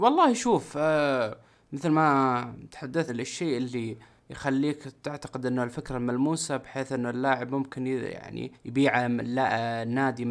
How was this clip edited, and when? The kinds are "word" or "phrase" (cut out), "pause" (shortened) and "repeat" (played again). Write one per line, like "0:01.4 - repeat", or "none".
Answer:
0:03.1 - word
0:08.5 - pause

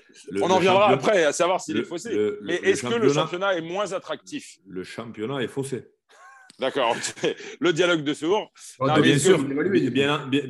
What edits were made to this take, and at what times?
0:06.5 - pause

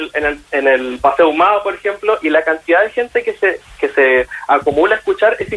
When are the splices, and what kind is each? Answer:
none

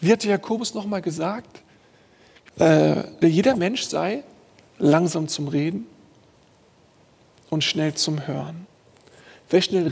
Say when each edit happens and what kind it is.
0:02.5 - word
0:03.2 - word

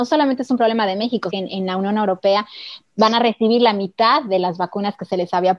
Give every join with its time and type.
0:01.3 - phrase

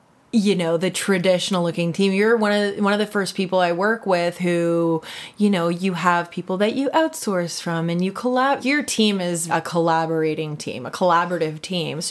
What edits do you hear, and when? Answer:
0:08.6 - word
0:09.5 - word

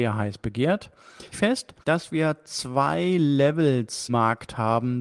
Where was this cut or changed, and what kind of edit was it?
0:01.3 - phrase
0:01.8 - pause
0:04.1 - word

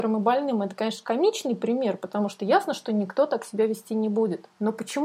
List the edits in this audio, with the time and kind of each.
none

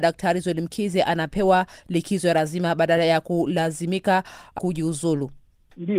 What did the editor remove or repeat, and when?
none

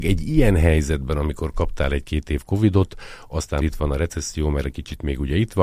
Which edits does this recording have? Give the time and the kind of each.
0:03.6 - word

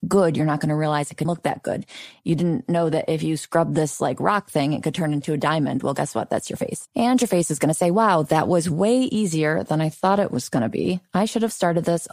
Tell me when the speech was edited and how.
0:01.2 - word

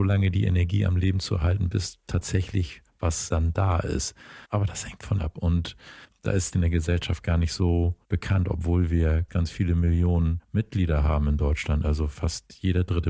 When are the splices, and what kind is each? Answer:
0:03.3 - word
0:04.4 - pause
0:05.2 - phrase
0:06.0 - pause
0:06.5 - phrase
0:08.0 - pause
0:09.3 - word
0:10.4 - word

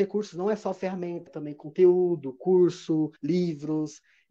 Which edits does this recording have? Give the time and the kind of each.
0:01.3 - word
0:03.2 - pause

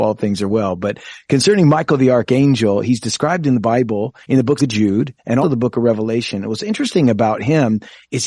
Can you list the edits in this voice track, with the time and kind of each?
0:04.2 - pause
0:04.6 - phrase
0:05.4 - word

